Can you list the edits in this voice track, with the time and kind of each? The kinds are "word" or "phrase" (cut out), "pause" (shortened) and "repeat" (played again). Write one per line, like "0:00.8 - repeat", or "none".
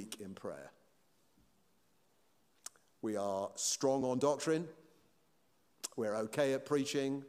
none

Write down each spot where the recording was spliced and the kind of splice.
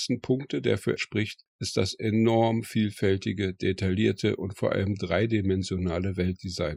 0:01.0 - word

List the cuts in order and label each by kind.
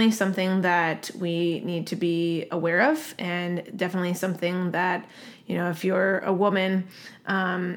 none

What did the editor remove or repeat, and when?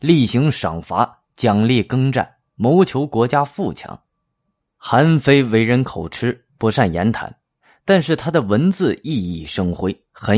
none

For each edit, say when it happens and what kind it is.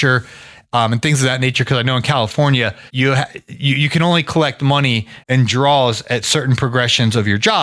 0:02.9 - pause
0:05.2 - pause

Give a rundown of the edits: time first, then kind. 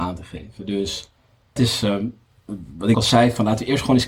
0:01.6 - word
0:02.9 - phrase

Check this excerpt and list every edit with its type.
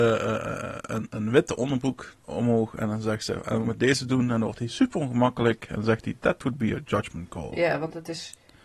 0:01.1 - word
0:02.2 - pause
0:03.6 - phrase

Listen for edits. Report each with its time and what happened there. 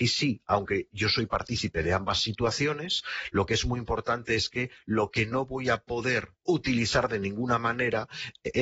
0:06.4 - pause

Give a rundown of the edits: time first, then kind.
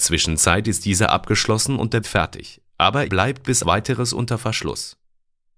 0:02.0 - word
0:03.1 - word
0:03.6 - word

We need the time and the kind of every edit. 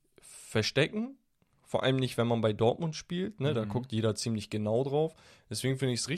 none

